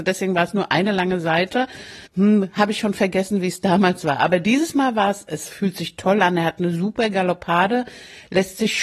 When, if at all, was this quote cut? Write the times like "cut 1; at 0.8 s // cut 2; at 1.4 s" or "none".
cut 1; at 2.1 s